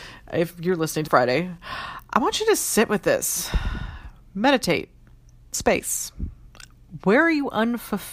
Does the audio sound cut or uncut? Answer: cut